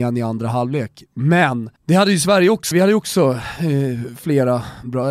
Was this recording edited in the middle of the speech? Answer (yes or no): yes